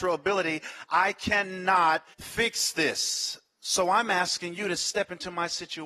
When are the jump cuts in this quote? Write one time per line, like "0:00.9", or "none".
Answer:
0:02.1